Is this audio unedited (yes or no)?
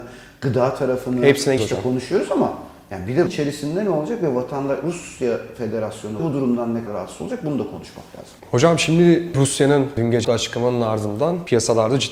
no